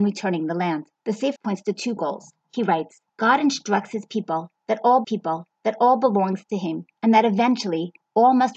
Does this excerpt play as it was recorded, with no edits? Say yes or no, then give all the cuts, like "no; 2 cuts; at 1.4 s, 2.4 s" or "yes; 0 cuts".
no; 7 cuts; at 1.0 s, 1.4 s, 2.0 s, 2.4 s, 3.1 s, 5.0 s, 7.0 s